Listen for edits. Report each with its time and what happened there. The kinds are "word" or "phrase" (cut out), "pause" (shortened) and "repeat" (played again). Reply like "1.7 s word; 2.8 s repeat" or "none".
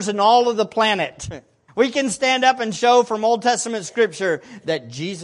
1.7 s pause